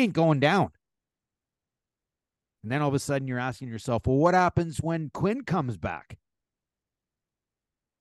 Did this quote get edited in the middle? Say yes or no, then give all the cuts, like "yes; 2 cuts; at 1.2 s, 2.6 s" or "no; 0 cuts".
no; 0 cuts